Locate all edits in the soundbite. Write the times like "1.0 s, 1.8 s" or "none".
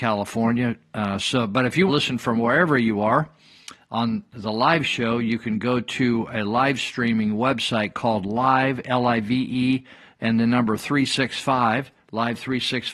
1.9 s